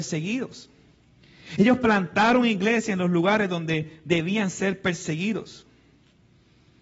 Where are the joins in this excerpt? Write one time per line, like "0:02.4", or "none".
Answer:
none